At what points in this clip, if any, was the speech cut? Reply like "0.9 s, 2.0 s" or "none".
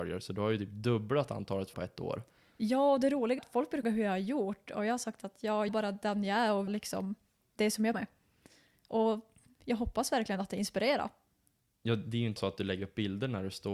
1.7 s, 3.4 s, 3.8 s, 5.7 s, 6.7 s, 7.9 s, 12.4 s